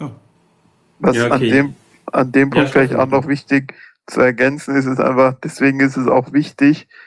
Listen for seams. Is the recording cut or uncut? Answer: uncut